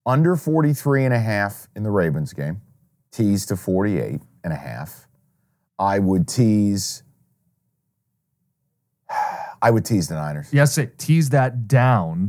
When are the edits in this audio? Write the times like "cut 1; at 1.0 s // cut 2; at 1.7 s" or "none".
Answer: none